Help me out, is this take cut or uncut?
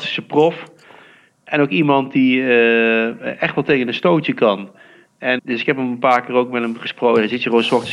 cut